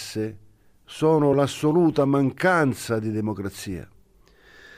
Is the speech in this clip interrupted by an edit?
no; 0 cuts

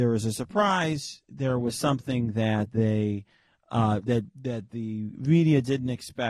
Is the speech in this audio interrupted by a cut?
no; 0 cuts

